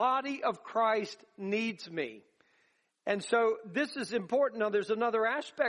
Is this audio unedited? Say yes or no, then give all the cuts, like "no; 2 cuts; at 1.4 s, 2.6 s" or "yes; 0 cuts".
yes; 0 cuts